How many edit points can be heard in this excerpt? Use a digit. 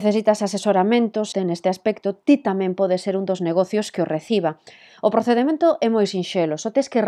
1